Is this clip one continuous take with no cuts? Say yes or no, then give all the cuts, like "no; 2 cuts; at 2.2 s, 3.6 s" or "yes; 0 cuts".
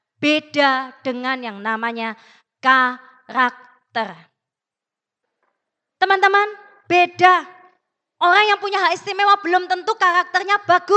yes; 0 cuts